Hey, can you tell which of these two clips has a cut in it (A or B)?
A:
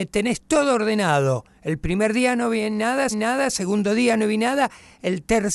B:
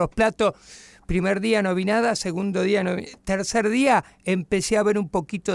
A